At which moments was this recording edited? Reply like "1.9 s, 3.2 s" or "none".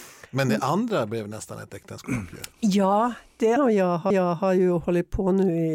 3.6 s, 4.1 s